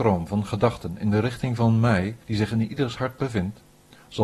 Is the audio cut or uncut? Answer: cut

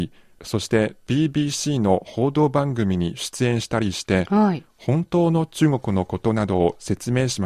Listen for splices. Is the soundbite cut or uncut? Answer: uncut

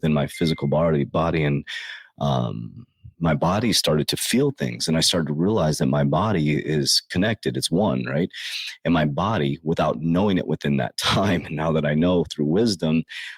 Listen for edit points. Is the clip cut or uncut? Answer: cut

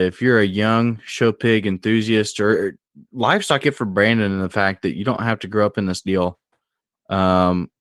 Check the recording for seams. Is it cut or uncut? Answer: cut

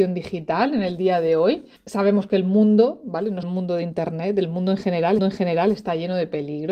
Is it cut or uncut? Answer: cut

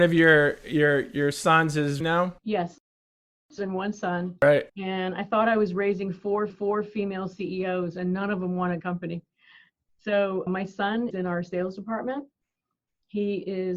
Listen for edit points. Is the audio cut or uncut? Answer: cut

